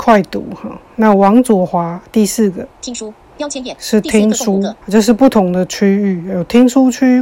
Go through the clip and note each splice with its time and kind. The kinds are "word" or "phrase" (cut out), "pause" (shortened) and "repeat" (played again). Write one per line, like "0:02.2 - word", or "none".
0:02.7 - pause
0:04.8 - pause